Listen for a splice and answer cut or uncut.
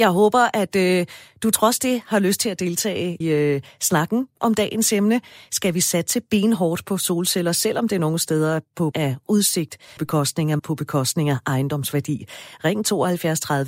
cut